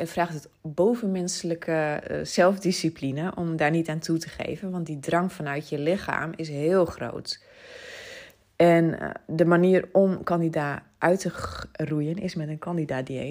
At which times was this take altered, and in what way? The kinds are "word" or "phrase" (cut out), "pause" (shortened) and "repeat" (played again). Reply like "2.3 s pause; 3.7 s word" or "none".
none